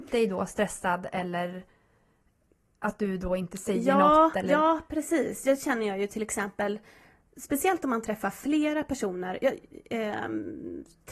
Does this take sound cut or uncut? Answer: uncut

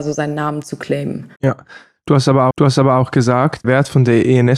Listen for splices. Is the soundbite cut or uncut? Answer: cut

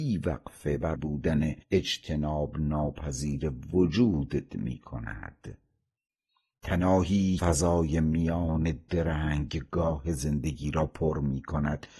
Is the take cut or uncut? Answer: cut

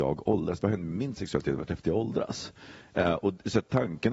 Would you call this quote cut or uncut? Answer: uncut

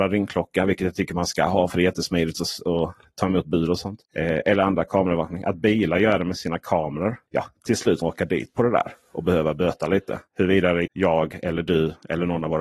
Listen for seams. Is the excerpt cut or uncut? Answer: cut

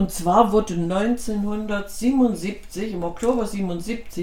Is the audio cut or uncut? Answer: uncut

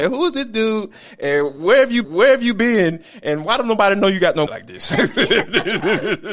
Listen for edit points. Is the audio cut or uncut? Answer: cut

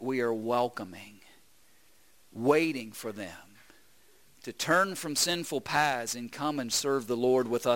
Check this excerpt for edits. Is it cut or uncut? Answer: uncut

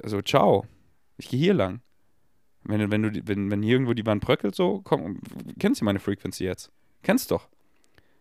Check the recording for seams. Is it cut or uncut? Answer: uncut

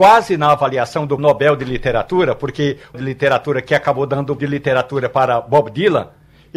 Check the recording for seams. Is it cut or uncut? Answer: cut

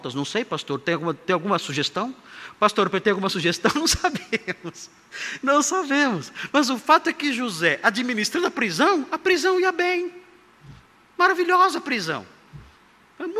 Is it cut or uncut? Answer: uncut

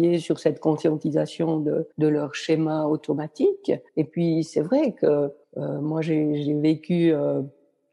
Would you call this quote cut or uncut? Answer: cut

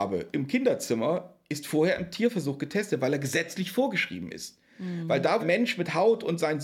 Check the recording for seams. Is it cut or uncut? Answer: cut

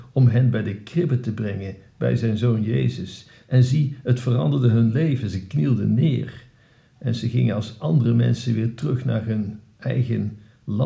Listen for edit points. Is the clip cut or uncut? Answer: uncut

